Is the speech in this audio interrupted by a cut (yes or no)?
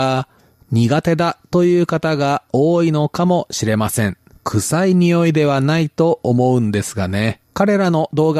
yes